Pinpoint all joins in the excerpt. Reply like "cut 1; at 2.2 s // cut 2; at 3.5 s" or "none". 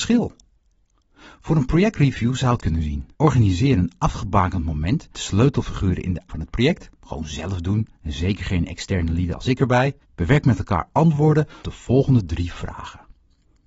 cut 1; at 2.6 s // cut 2; at 3.1 s // cut 3; at 5.1 s // cut 4; at 6.3 s // cut 5; at 7.0 s // cut 6; at 10.0 s // cut 7; at 11.6 s

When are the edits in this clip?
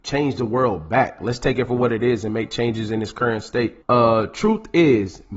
cut 1; at 3.8 s

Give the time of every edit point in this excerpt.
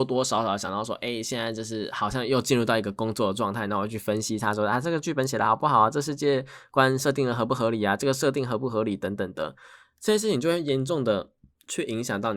none

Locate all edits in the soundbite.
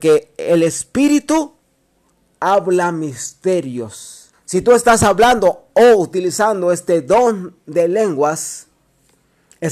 cut 1; at 4.3 s

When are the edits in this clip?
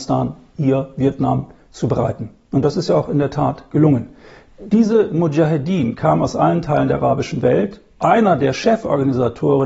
none

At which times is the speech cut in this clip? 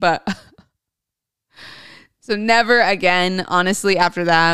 none

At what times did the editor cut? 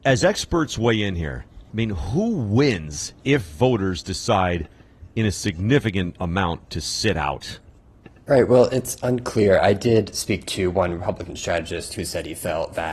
cut 1; at 1.7 s // cut 2; at 3.2 s // cut 3; at 7.8 s

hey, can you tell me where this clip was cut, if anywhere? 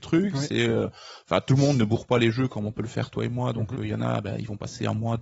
none

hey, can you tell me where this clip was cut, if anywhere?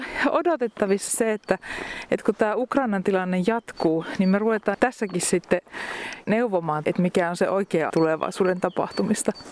cut 1; at 1.1 s // cut 2; at 4.7 s // cut 3; at 6.2 s // cut 4; at 6.8 s // cut 5; at 7.9 s

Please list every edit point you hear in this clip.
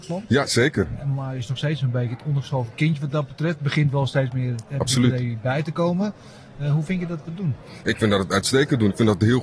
none

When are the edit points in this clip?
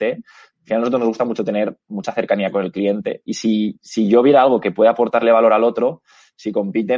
none

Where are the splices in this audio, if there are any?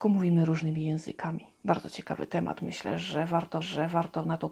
cut 1; at 3.6 s

